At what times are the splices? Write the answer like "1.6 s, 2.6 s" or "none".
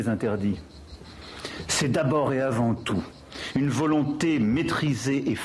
none